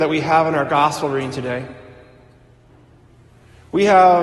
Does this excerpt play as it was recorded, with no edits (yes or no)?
yes